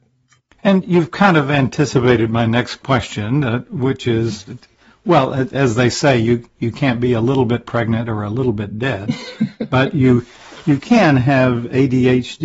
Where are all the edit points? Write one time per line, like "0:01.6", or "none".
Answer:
none